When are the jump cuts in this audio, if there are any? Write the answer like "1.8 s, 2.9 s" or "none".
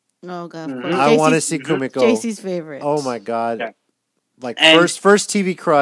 none